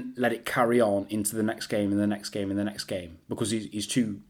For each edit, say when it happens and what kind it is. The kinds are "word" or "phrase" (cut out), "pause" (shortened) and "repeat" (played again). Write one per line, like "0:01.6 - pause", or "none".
none

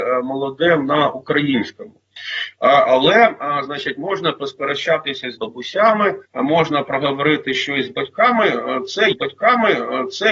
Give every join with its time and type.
0:05.4 - word
0:06.3 - pause
0:09.1 - repeat

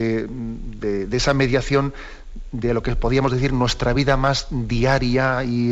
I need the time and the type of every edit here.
none

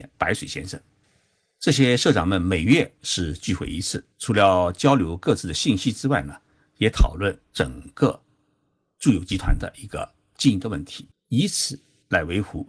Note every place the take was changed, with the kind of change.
0:04.1 - pause
0:07.4 - pause
0:11.1 - pause

